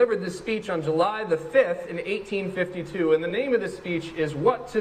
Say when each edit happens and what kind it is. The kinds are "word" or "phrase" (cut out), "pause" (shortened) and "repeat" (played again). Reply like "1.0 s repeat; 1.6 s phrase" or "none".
none

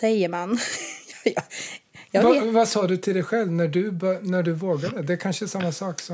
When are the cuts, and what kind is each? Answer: none

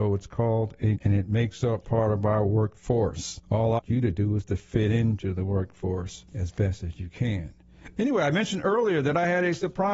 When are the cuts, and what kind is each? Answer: 1.0 s word; 3.4 s pause; 3.8 s word; 6.3 s pause

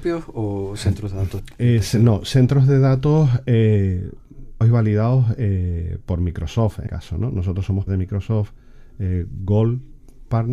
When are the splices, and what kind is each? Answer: 1.4 s word; 4.6 s word; 6.9 s word; 7.9 s word

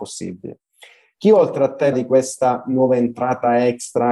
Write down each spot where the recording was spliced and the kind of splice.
1.9 s word

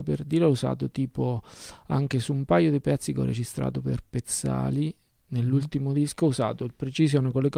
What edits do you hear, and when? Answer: none

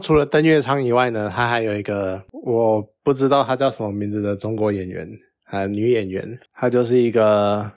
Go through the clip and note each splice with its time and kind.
none

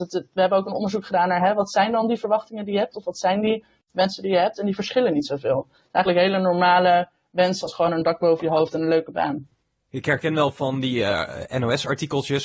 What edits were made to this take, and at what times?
none

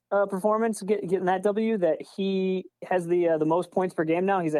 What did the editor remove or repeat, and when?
2.8 s pause

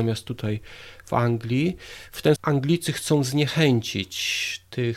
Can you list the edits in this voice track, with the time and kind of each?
2.4 s word

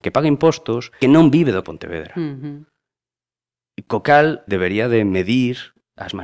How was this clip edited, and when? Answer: 1.0 s phrase; 1.6 s word; 4.5 s word

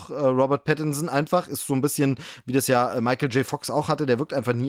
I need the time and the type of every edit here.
none

